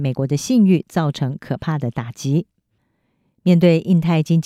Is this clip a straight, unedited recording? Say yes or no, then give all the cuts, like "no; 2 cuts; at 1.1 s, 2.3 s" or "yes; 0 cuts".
yes; 0 cuts